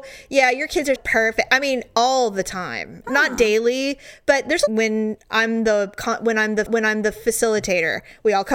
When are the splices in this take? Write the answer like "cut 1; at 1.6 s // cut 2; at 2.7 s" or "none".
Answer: cut 1; at 1.0 s // cut 2; at 3.0 s // cut 3; at 4.7 s // cut 4; at 6.7 s